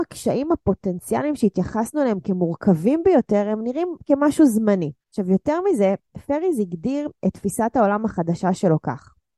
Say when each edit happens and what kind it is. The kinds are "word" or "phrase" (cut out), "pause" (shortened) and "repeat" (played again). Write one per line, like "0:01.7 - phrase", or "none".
0:05.0 - pause